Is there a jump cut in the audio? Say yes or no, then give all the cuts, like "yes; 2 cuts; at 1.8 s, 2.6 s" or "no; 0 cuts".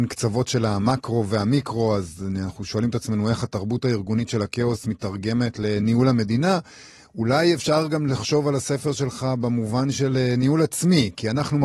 no; 0 cuts